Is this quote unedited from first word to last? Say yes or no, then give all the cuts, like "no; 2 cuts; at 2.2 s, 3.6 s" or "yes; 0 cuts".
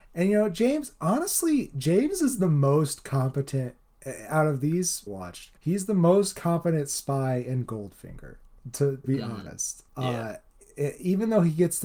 no; 4 cuts; at 5.1 s, 5.6 s, 9.0 s, 9.9 s